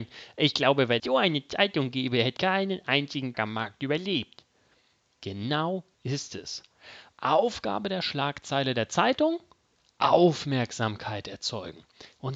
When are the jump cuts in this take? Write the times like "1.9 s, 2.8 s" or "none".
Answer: 1.0 s, 2.4 s, 3.3 s, 5.9 s